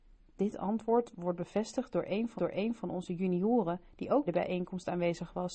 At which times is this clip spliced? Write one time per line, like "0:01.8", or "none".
0:02.4
0:04.3